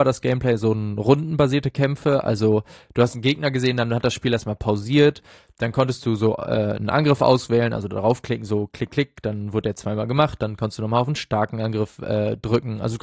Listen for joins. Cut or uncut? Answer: uncut